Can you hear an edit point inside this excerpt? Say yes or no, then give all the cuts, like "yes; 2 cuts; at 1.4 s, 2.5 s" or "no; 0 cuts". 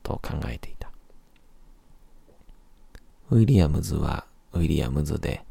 yes; 1 cut; at 3.1 s